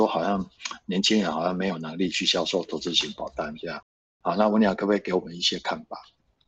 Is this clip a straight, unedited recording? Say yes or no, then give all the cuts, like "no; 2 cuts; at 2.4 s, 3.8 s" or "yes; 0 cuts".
yes; 0 cuts